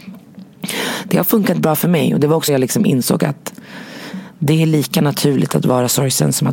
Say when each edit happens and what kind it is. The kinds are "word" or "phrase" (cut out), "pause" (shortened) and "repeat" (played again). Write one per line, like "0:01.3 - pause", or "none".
0:02.5 - word